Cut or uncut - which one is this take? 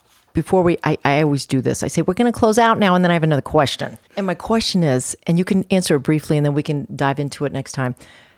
cut